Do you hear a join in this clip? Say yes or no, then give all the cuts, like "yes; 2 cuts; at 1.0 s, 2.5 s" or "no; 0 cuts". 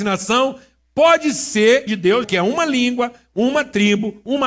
yes; 2 cuts; at 1.9 s, 2.2 s